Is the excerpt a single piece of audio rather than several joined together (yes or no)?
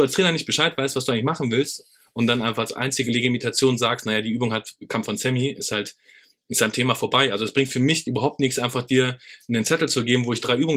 yes